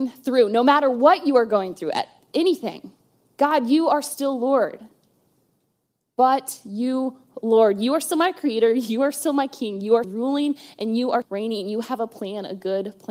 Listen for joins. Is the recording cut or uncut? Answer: cut